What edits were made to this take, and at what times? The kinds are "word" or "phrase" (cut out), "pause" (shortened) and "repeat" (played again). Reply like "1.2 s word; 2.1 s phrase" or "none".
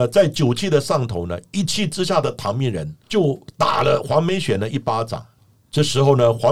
3.0 s pause; 5.4 s pause